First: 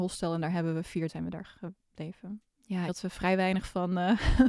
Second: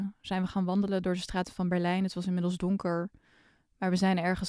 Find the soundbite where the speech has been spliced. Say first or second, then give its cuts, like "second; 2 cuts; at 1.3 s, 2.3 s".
first; 2 cuts; at 1.1 s, 2.9 s